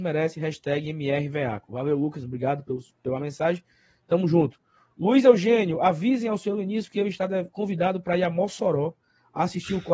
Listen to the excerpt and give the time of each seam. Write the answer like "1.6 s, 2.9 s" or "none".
none